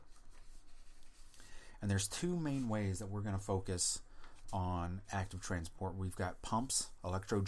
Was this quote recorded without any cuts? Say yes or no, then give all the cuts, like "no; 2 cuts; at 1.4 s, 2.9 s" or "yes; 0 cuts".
yes; 0 cuts